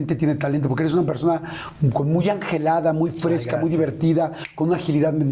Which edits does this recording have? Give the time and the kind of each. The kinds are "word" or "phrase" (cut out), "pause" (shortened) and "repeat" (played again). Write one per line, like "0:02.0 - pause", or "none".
none